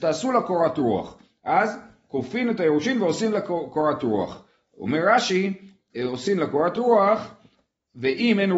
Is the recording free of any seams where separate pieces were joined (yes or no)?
yes